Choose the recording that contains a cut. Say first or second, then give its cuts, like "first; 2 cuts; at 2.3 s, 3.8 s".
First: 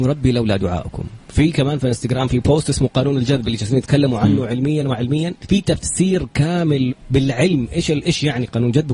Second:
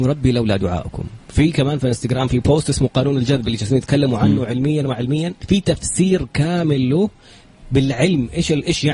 first; 1 cut; at 6.9 s